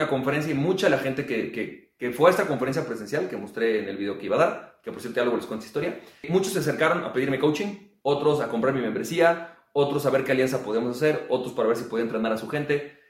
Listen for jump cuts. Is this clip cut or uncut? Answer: uncut